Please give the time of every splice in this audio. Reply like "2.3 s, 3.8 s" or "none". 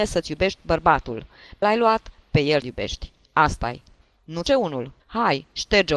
1.6 s, 2.6 s, 4.5 s, 5.0 s